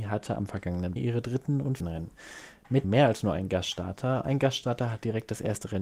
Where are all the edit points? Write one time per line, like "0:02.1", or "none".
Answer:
0:01.0
0:01.8
0:02.8
0:04.2